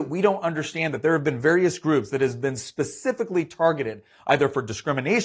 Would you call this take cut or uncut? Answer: uncut